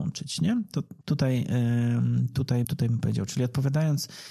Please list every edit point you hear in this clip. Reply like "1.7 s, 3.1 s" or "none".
1.0 s, 2.6 s

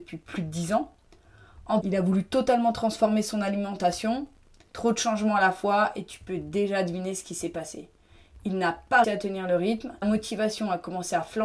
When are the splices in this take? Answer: 1.8 s, 9.0 s, 10.0 s

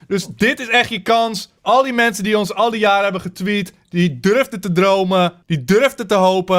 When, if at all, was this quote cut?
1.6 s, 5.4 s

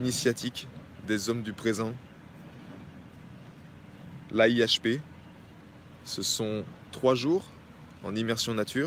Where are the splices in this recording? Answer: none

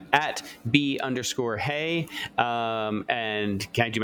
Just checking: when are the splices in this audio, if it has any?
none

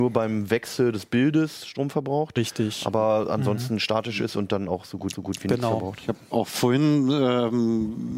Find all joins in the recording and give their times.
5.1 s

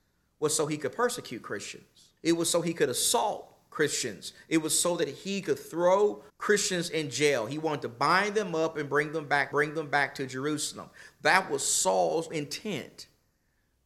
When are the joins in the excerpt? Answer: 2.2 s, 6.3 s, 9.5 s, 12.3 s

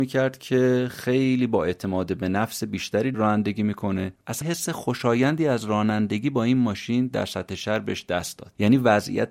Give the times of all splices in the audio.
3.1 s, 4.4 s

